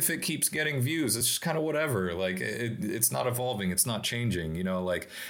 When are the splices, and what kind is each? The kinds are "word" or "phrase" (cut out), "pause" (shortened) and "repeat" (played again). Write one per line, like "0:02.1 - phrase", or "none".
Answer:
none

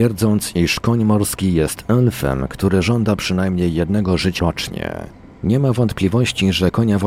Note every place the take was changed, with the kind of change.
0:04.4 - word

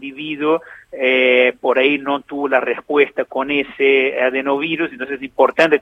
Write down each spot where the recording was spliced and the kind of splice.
none

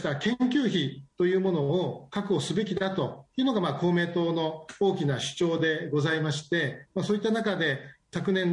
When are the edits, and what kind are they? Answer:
0:01.1 - pause

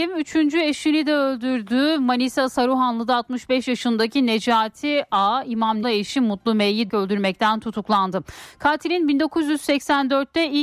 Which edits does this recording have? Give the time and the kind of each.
0:05.8 - word
0:06.9 - word

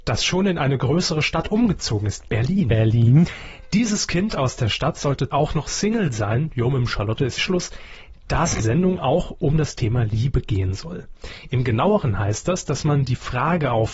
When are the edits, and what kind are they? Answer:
0:05.3 - word
0:07.4 - word
0:08.6 - word

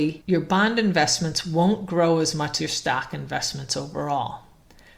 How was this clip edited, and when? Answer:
0:02.6 - word

